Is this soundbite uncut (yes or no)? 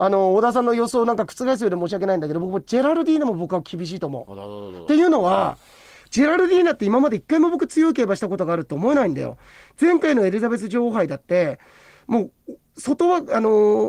yes